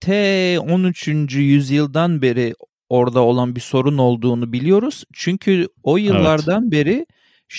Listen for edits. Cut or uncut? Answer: uncut